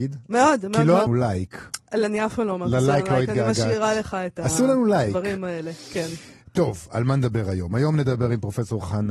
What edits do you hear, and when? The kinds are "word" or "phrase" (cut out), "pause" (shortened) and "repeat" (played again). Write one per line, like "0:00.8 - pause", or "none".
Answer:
0:01.1 - phrase